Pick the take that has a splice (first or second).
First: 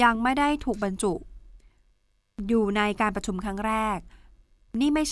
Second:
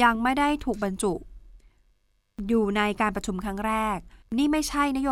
second